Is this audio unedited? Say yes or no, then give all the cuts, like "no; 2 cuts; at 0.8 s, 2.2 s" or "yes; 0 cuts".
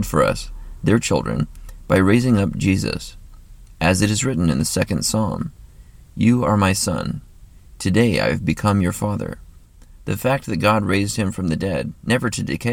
yes; 0 cuts